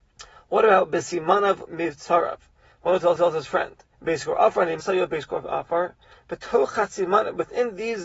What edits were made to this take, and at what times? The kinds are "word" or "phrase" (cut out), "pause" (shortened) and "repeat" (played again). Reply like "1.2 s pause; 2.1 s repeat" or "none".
1.7 s word; 3.2 s repeat; 3.9 s pause; 4.8 s word